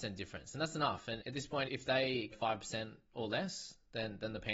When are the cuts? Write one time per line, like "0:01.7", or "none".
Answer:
0:01.2
0:01.6
0:02.3